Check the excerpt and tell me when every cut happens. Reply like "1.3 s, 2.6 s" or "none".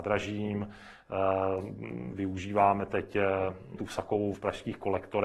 3.8 s, 4.3 s